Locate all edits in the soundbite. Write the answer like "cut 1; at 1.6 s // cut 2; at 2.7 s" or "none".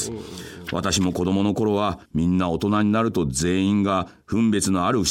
cut 1; at 2.1 s